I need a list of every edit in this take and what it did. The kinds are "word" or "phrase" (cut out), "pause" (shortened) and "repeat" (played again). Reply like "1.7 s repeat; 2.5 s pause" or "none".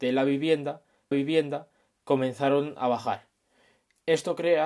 1.1 s repeat